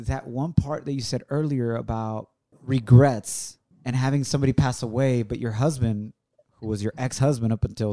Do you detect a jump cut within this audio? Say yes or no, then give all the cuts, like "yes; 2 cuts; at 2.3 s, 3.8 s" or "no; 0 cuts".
no; 0 cuts